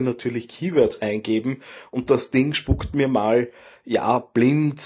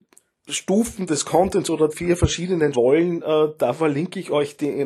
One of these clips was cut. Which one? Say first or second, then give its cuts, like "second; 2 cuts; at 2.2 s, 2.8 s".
second; 2 cuts; at 1.9 s, 2.7 s